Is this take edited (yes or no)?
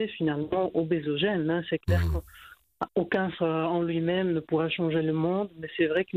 yes